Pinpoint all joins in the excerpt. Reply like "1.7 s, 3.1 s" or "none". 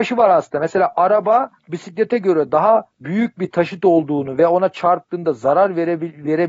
1.6 s, 2.9 s